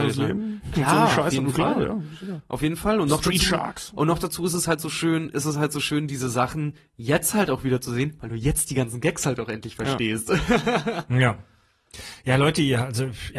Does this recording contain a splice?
no; 0 cuts

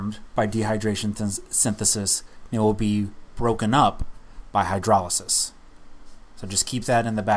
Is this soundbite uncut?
yes; 0 cuts

